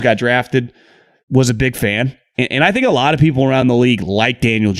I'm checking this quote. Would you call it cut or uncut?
uncut